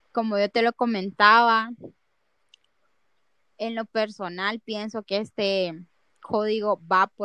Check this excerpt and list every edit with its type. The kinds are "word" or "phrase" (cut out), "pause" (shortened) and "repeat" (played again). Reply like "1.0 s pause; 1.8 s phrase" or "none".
none